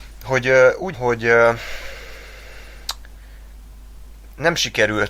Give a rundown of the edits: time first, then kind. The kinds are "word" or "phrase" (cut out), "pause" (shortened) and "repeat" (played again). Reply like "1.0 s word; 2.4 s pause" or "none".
0.9 s word